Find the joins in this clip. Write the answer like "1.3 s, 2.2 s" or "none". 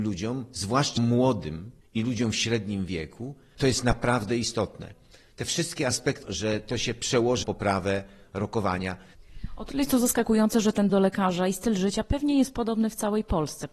1.0 s, 3.5 s, 6.2 s, 7.4 s, 10.9 s